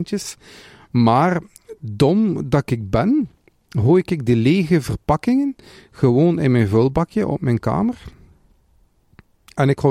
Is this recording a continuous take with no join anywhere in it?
yes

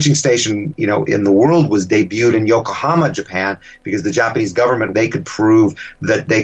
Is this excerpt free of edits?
no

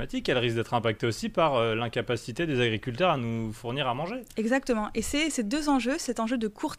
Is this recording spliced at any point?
no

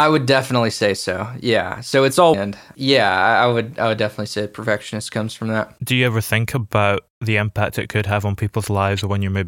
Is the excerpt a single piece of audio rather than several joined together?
no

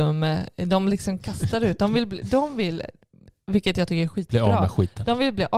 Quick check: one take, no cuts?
yes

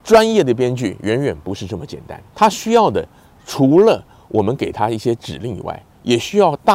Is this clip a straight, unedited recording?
no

